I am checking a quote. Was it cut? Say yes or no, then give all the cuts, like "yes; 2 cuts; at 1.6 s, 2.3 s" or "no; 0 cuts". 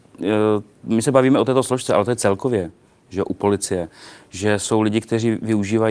no; 0 cuts